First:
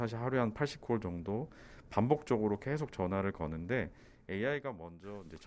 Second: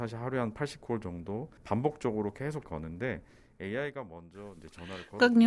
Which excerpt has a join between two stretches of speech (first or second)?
second